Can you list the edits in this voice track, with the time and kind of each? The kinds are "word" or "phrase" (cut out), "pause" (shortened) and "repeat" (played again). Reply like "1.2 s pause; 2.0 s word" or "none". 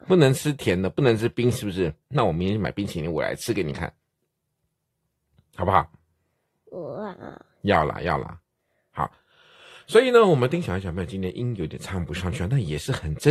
2.0 s pause